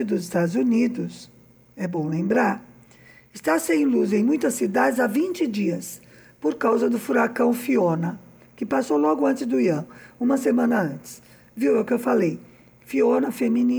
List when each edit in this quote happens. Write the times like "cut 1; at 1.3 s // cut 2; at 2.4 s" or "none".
none